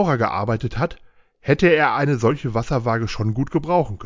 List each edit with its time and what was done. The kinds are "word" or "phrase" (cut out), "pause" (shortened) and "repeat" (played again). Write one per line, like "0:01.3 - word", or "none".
none